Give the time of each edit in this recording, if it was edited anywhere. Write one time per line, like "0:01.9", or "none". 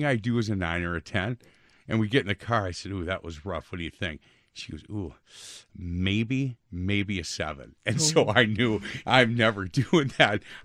0:09.0